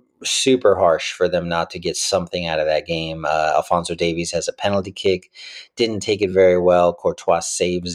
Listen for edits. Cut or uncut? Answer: uncut